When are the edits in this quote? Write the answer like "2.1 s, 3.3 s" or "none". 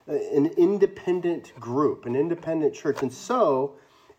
none